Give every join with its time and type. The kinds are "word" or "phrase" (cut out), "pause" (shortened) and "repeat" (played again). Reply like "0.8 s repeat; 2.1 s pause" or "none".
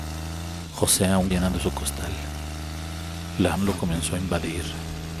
1.3 s word; 3.6 s word